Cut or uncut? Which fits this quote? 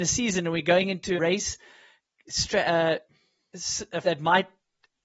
cut